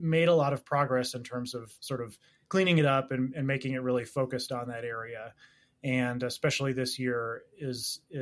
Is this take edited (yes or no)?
yes